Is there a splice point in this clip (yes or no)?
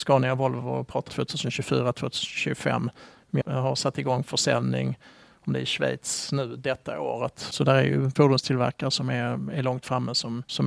yes